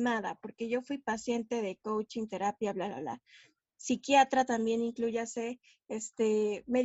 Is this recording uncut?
yes; 0 cuts

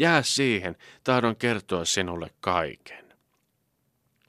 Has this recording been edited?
no; 0 cuts

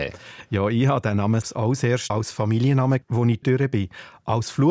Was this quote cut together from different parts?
yes; 4 cuts; at 1.4 s, 2.1 s, 3.0 s, 3.4 s

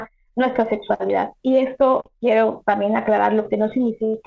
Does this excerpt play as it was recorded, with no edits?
yes; 0 cuts

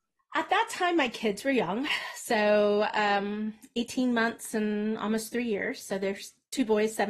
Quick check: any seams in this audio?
no; 0 cuts

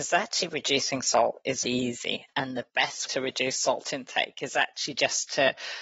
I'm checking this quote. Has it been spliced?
yes; 2 cuts; at 1.6 s, 3.1 s

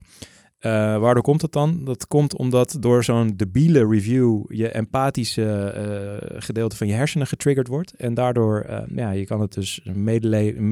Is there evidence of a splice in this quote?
no; 0 cuts

